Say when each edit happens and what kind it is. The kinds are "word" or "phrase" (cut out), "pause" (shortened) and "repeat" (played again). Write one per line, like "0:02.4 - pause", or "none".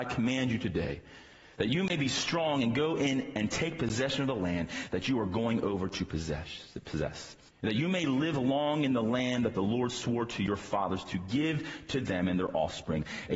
0:07.5 - pause